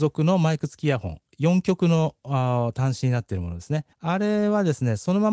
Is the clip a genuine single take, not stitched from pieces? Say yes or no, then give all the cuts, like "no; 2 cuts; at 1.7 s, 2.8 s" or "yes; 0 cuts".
no; 1 cut; at 3.9 s